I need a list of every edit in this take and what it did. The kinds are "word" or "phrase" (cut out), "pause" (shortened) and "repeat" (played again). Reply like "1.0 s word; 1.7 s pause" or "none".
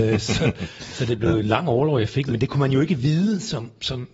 none